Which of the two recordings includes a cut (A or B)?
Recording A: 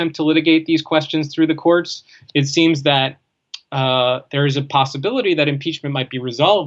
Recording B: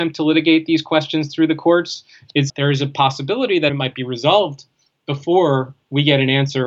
B